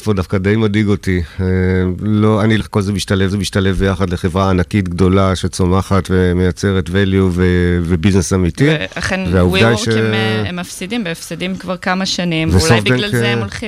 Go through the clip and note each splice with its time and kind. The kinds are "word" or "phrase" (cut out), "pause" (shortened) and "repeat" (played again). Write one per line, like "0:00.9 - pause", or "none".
0:02.6 - word
0:03.3 - repeat